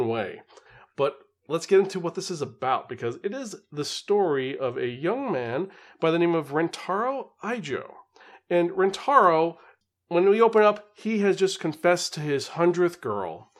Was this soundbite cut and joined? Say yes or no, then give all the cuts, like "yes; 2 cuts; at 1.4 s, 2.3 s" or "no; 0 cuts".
no; 0 cuts